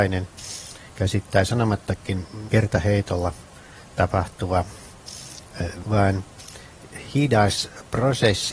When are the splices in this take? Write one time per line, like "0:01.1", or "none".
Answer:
0:02.5
0:05.8